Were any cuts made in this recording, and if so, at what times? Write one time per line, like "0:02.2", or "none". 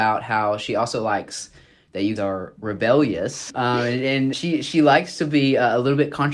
0:02.2
0:03.5
0:04.3